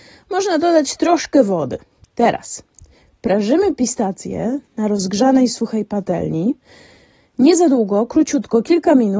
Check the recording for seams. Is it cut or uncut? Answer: uncut